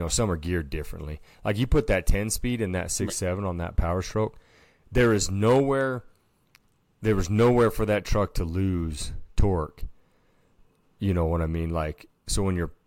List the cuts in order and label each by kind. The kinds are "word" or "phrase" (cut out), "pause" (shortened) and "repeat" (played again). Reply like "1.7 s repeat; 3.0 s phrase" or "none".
none